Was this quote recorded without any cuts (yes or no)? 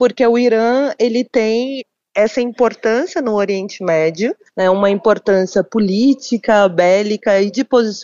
yes